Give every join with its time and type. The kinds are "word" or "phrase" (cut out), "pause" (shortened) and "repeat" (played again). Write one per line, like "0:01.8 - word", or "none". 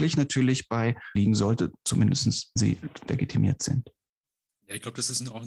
0:01.2 - word
0:02.6 - word
0:03.1 - word